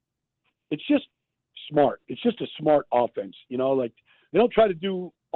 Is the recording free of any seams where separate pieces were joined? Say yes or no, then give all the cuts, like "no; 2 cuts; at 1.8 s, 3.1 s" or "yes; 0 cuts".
yes; 0 cuts